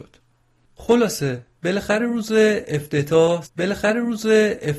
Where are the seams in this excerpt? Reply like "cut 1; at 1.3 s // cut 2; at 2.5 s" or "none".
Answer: cut 1; at 3.4 s